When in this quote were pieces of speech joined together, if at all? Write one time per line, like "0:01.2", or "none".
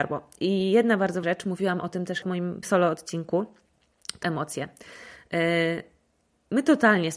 0:01.2
0:02.2
0:02.6
0:04.2